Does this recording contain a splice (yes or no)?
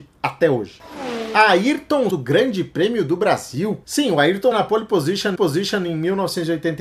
yes